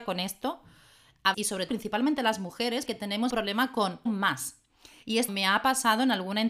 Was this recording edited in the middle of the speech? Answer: yes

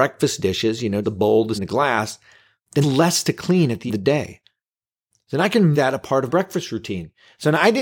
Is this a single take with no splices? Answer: no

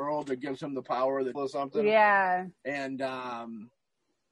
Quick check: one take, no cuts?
no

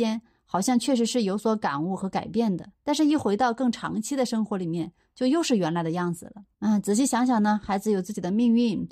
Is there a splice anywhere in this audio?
yes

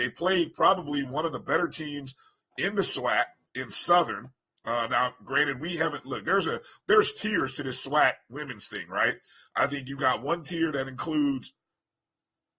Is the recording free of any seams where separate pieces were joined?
yes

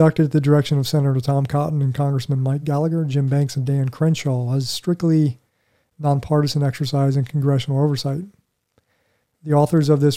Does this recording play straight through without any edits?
yes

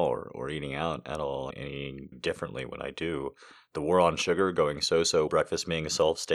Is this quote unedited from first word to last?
no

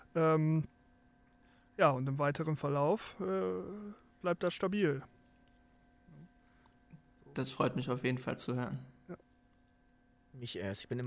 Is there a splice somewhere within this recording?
no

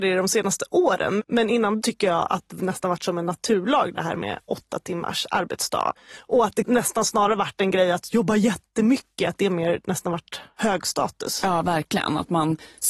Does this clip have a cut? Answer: yes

